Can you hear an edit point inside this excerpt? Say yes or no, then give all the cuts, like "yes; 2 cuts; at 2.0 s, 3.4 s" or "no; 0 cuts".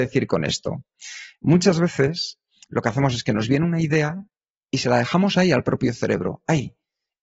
no; 0 cuts